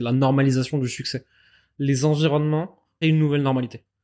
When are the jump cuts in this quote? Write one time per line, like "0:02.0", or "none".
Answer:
0:03.0